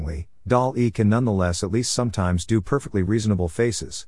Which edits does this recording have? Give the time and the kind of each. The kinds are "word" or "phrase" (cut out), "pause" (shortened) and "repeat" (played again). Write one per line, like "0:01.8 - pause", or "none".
none